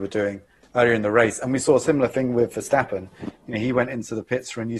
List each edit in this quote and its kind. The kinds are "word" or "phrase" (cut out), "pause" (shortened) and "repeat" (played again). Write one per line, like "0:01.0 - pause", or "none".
none